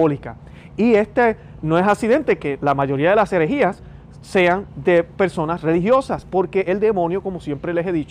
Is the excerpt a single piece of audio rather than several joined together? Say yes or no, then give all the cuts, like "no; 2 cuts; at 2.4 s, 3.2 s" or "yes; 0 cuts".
yes; 0 cuts